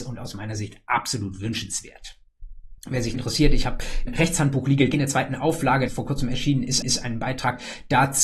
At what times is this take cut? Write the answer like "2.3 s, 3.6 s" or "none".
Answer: 2.8 s, 3.1 s, 4.1 s, 4.9 s, 5.9 s, 6.8 s